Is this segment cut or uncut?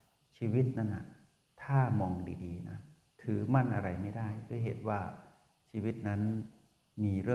uncut